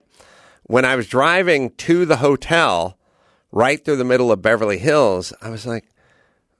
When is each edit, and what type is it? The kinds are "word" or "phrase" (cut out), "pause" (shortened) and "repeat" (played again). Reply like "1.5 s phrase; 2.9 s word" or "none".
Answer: none